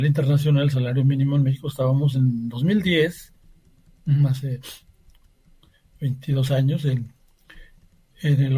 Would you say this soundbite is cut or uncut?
uncut